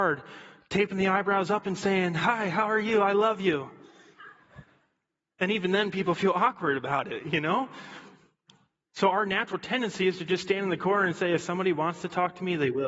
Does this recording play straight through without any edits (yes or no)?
yes